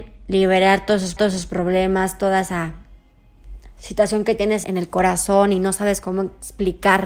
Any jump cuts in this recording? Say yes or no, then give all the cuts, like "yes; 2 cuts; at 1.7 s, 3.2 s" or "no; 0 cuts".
yes; 2 cuts; at 1.2 s, 4.6 s